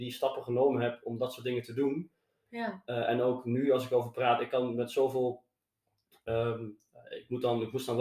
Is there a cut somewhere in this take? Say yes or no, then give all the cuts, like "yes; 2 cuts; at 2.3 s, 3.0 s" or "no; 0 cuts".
no; 0 cuts